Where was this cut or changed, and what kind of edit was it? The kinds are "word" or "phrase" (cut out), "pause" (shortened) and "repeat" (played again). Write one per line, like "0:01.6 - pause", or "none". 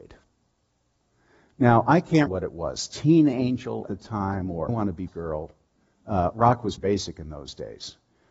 0:02.3 - word
0:03.9 - word
0:04.7 - word
0:05.1 - word
0:06.8 - word